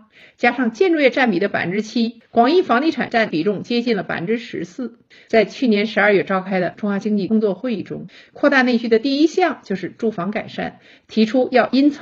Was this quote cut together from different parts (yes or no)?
yes